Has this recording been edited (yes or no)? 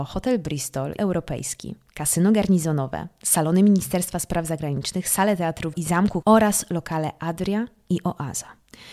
yes